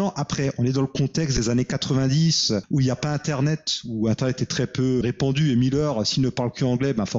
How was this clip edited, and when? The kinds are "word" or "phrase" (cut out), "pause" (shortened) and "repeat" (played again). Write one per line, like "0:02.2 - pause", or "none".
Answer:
0:05.0 - word